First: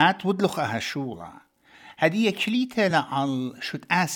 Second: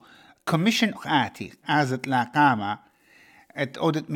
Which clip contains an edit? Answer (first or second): second